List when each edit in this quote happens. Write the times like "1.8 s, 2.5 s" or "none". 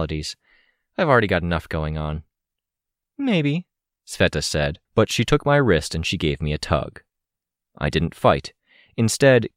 4.8 s